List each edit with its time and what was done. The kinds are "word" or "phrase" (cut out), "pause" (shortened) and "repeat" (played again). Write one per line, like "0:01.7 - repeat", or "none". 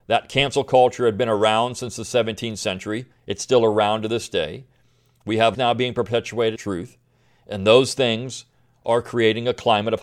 0:05.5 - word
0:06.6 - word